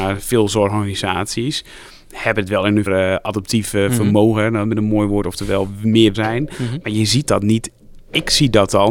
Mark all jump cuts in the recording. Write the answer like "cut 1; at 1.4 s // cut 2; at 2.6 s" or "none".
cut 1; at 2.9 s // cut 2; at 6.1 s